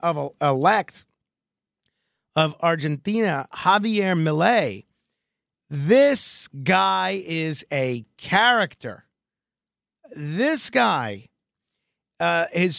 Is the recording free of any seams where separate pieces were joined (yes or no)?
yes